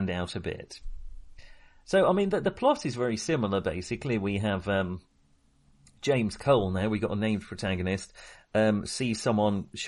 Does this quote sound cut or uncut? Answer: uncut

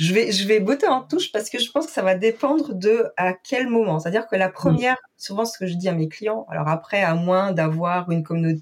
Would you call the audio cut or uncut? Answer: uncut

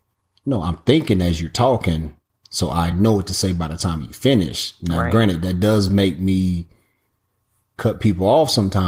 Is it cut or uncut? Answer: uncut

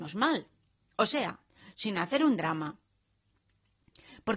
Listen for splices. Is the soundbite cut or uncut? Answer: cut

